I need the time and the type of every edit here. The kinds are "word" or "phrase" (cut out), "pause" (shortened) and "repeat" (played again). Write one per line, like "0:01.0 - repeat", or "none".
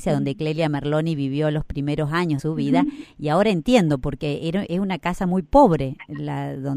0:02.4 - word